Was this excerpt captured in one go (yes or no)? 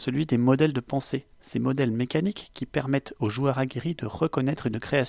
yes